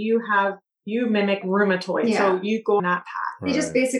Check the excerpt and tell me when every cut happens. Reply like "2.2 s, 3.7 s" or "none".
1.4 s, 2.8 s